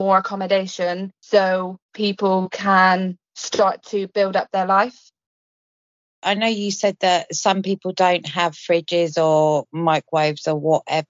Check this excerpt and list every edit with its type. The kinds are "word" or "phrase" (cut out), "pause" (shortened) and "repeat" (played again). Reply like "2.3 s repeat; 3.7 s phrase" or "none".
none